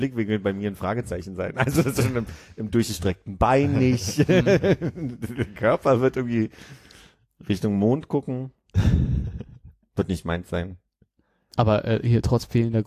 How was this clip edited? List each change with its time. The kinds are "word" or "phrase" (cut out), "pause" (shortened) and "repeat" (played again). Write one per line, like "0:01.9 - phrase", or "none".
none